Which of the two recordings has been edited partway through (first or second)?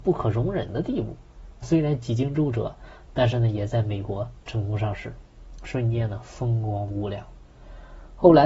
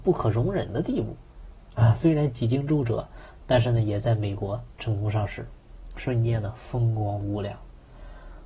first